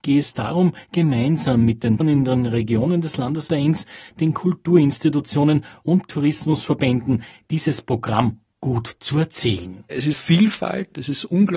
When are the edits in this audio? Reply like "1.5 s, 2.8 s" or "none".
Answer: 2.0 s, 3.5 s, 6.1 s, 10.1 s

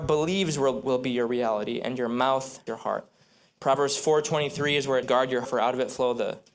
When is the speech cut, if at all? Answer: 2.7 s, 5.0 s, 5.4 s

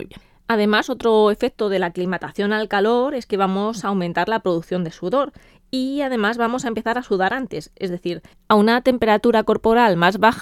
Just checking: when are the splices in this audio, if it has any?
none

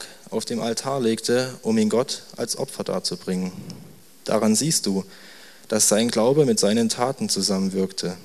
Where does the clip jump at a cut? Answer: none

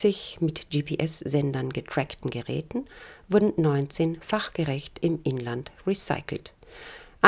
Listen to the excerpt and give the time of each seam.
none

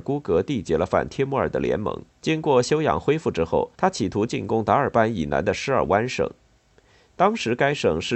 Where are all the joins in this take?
2.1 s, 3.7 s

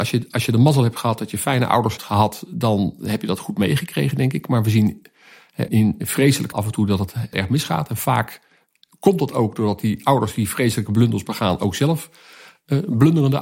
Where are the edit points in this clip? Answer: 2.0 s, 5.7 s, 6.5 s, 7.3 s

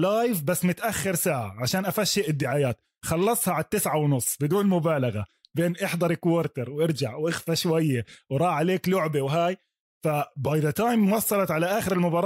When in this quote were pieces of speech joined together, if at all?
none

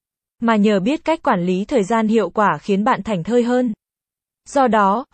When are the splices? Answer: none

